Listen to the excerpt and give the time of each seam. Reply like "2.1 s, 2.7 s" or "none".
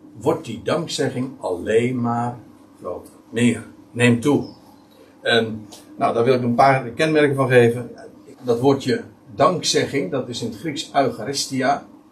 3.2 s, 8.3 s